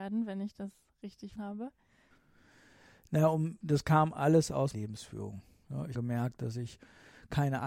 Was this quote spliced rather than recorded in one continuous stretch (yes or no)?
yes